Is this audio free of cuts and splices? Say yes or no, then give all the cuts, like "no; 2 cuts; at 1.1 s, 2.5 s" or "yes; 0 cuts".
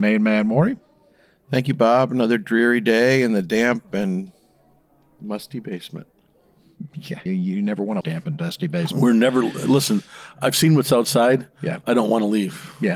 no; 2 cuts; at 7.3 s, 8.0 s